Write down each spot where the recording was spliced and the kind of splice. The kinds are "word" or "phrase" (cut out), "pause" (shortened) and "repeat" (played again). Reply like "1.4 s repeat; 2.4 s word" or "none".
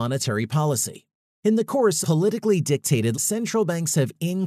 1.3 s pause; 2.0 s word; 3.1 s word